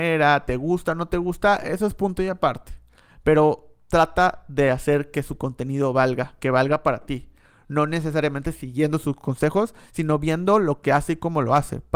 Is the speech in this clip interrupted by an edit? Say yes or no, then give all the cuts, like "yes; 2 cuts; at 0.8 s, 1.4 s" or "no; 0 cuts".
no; 0 cuts